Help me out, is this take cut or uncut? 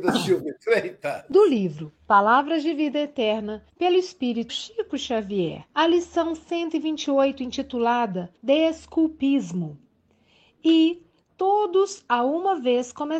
cut